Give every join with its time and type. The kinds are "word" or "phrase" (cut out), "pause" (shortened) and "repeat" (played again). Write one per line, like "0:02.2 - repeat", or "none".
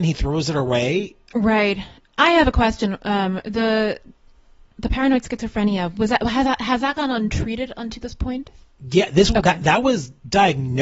none